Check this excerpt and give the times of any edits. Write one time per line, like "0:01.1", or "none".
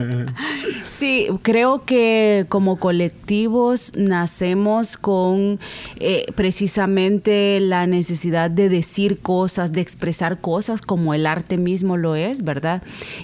none